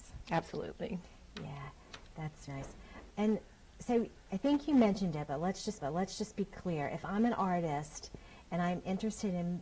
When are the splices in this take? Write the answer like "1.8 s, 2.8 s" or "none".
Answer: 2.5 s, 3.1 s, 5.8 s